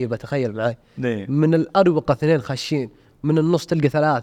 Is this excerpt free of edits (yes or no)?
yes